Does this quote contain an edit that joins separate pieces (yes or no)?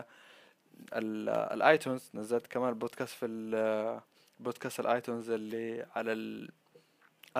no